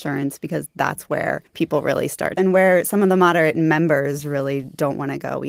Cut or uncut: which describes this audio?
cut